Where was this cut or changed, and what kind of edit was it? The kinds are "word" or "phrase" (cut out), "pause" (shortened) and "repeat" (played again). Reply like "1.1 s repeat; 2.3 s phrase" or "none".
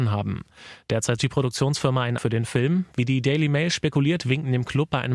1.2 s word; 2.2 s word